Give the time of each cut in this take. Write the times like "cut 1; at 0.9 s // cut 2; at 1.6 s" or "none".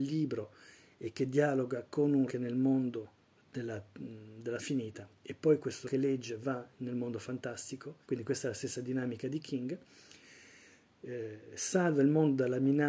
cut 1; at 2.3 s // cut 2; at 3.4 s // cut 3; at 4.6 s // cut 4; at 5.8 s // cut 5; at 8.0 s